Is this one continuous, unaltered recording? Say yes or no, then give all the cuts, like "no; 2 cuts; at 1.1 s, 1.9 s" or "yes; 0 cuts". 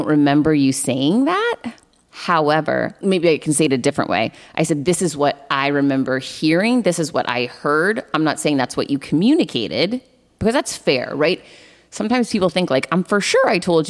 yes; 0 cuts